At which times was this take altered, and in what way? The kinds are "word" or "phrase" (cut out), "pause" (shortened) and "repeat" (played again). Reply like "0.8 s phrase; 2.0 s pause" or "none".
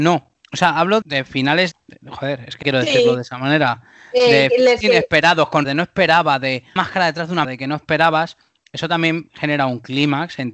1.0 s word; 1.7 s word; 2.6 s word; 4.8 s word; 5.6 s word; 6.8 s word; 7.4 s word